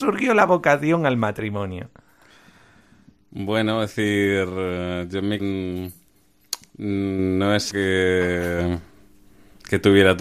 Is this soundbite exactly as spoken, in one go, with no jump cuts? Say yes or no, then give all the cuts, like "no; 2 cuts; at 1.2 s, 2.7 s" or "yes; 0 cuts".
no; 2 cuts; at 5.4 s, 7.7 s